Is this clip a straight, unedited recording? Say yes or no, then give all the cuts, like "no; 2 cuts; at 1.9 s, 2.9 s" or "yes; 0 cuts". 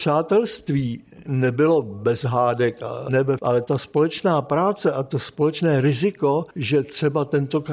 no; 3 cuts; at 3.1 s, 3.4 s, 6.5 s